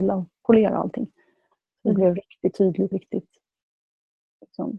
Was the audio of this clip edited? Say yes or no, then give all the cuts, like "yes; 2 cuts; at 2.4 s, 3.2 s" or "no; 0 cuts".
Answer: yes; 2 cuts; at 2.5 s, 2.9 s